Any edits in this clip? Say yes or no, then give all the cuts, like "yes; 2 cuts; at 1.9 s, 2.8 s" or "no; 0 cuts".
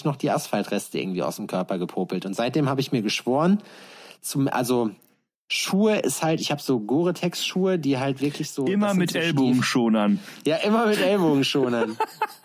no; 0 cuts